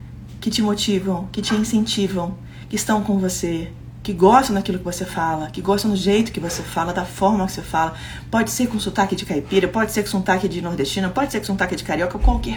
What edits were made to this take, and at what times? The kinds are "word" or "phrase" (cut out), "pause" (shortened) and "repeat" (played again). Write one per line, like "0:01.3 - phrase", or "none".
none